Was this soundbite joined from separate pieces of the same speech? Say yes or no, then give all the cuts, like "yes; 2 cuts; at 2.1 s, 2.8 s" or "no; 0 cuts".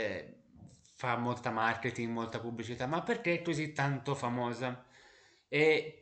no; 0 cuts